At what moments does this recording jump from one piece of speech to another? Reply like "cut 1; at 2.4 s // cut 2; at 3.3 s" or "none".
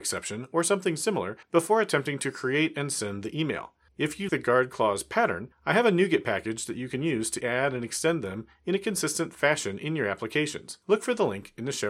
cut 1; at 1.4 s // cut 2; at 3.9 s // cut 3; at 4.3 s // cut 4; at 5.5 s // cut 5; at 7.4 s // cut 6; at 10.8 s